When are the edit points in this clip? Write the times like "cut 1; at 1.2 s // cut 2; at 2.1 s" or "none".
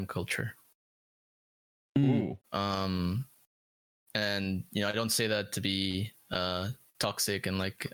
cut 1; at 2.4 s